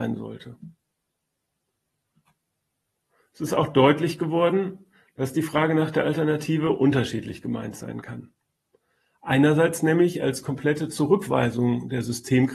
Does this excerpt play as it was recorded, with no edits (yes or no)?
yes